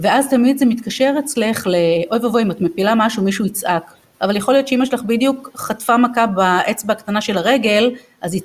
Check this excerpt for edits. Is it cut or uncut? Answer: uncut